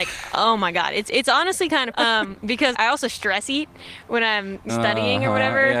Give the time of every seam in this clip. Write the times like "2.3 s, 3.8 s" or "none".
1.9 s, 2.7 s, 4.7 s